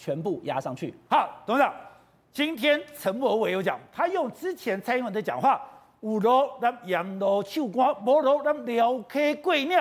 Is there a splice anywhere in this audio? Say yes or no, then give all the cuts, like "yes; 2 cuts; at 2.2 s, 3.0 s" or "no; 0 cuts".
no; 0 cuts